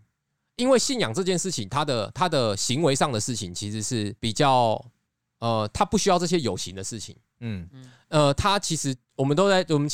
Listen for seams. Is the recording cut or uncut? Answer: cut